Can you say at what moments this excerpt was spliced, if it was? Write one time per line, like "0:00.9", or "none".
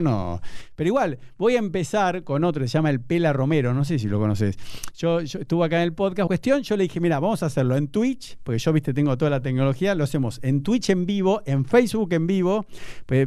0:06.3

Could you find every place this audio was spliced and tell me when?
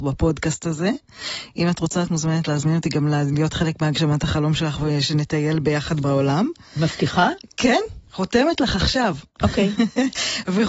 0:09.3

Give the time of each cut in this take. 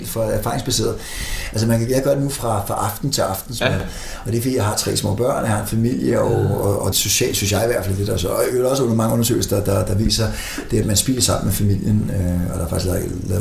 0:06.9
0:10.8

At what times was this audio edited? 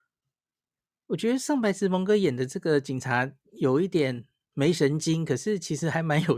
none

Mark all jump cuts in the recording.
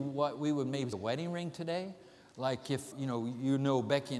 0:00.9
0:02.9

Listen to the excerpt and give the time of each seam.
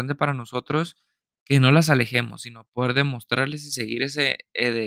none

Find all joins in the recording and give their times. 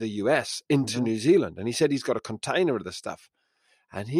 none

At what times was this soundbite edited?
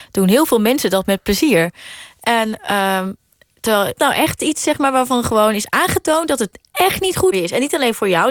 0:04.0
0:06.7
0:07.3

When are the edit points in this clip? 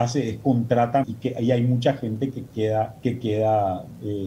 0:01.0
0:03.0

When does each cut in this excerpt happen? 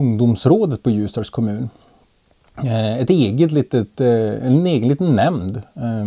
none

